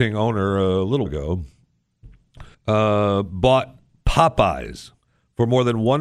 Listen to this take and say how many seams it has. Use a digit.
3